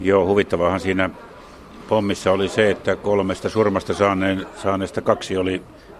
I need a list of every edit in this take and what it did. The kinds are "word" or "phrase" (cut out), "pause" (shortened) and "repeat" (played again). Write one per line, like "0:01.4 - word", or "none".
none